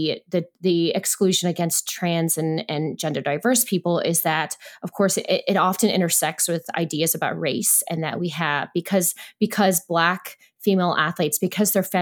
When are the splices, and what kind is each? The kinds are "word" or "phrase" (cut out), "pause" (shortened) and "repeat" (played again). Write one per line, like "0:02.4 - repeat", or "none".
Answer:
none